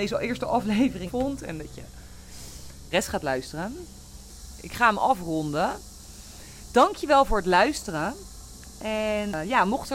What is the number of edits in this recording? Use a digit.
2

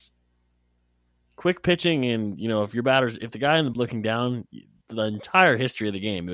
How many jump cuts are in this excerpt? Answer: 2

